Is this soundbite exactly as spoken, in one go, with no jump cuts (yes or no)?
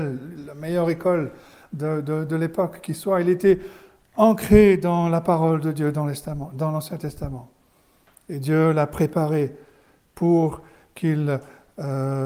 yes